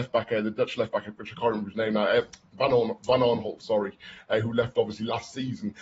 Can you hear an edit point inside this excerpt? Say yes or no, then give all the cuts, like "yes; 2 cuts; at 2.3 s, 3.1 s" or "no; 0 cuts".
no; 0 cuts